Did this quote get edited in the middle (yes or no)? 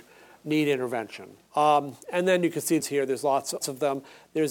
yes